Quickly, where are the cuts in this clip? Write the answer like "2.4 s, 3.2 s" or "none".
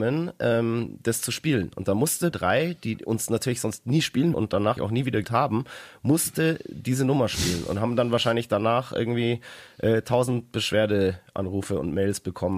2.3 s, 4.3 s, 4.8 s, 5.2 s